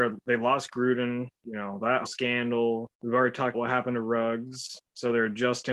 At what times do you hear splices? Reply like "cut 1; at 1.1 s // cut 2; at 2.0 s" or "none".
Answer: cut 1; at 1.4 s // cut 2; at 2.1 s // cut 3; at 2.9 s // cut 4; at 3.5 s